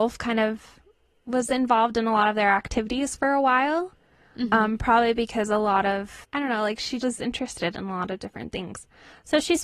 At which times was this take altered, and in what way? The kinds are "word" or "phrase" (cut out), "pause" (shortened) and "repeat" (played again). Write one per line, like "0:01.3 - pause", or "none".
0:07.0 - word